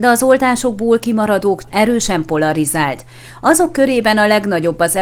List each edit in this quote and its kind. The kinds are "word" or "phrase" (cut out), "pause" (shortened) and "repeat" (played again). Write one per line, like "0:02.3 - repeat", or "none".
0:01.6 - word